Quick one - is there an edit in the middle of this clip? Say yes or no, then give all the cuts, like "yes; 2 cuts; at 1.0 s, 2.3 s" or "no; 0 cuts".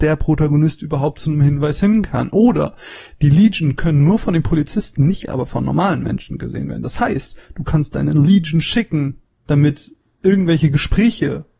no; 0 cuts